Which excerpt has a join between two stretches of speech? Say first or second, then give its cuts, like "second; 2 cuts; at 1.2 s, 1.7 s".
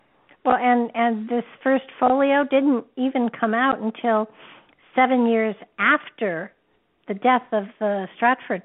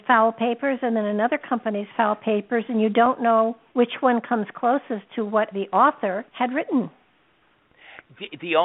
second; 3 cuts; at 3.7 s, 5.5 s, 6.3 s